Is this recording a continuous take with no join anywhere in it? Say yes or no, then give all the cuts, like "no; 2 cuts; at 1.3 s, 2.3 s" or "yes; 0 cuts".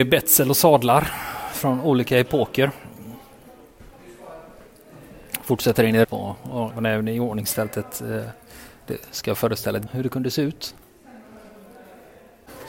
no; 3 cuts; at 6.0 s, 6.7 s, 9.9 s